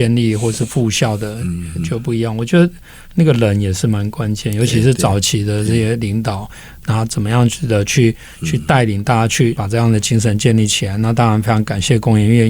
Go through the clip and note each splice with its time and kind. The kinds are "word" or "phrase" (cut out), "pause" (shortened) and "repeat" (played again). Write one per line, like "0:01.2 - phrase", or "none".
0:03.0 - pause